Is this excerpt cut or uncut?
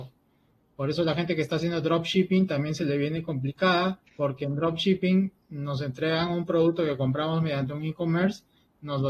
cut